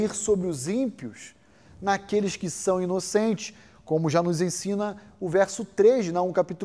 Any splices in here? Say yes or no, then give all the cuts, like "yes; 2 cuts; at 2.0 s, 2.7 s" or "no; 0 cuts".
no; 0 cuts